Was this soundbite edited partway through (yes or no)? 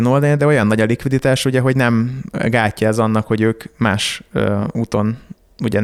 no